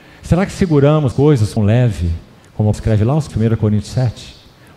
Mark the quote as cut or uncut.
cut